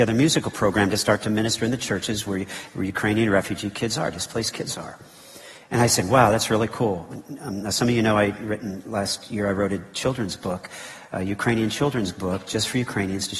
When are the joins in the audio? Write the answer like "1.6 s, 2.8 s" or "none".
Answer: none